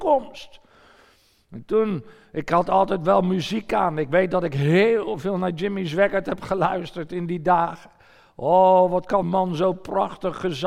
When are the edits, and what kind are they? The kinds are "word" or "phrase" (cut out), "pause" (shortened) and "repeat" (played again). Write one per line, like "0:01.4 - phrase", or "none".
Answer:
0:09.2 - word